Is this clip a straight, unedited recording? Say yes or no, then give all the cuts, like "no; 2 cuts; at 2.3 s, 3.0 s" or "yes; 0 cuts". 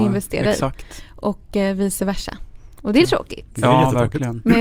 no; 1 cut; at 3.0 s